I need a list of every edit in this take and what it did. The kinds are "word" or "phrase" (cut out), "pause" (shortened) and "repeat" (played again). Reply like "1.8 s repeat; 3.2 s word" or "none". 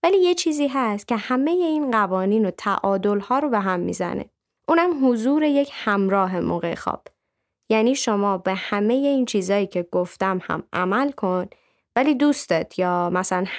none